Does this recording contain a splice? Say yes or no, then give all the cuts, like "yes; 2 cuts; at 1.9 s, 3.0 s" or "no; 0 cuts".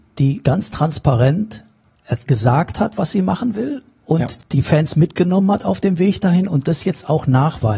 yes; 1 cut; at 4.4 s